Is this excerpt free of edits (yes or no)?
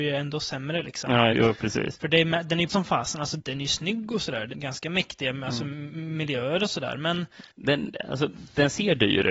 no